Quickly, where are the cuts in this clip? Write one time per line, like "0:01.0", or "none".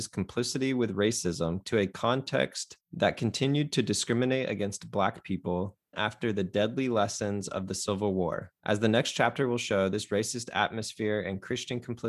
0:01.6
0:02.8
0:05.9
0:08.6